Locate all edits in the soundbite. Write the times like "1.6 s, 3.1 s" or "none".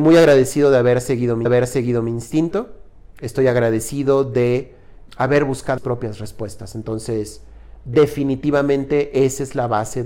1.5 s, 5.1 s, 5.8 s